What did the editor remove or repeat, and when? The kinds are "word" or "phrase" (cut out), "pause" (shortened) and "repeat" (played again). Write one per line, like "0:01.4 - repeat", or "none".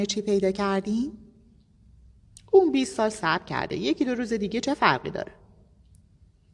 none